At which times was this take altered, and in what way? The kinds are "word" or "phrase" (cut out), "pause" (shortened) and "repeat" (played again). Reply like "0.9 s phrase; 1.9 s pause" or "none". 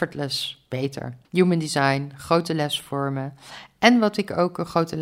1.2 s pause